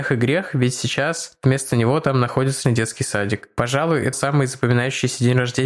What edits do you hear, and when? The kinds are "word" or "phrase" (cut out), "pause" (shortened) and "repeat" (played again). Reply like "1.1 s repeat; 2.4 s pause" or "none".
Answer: 2.6 s word; 4.1 s word